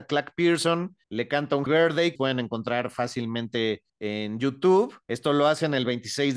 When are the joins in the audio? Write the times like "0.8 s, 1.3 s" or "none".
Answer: 1.0 s, 1.7 s, 2.2 s, 3.9 s, 5.0 s